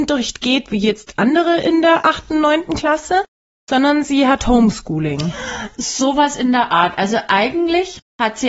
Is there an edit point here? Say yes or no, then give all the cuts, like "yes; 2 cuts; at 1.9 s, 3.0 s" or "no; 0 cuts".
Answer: no; 0 cuts